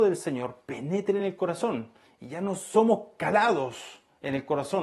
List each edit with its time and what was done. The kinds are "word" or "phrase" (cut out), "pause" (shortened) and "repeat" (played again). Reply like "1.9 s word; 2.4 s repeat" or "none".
none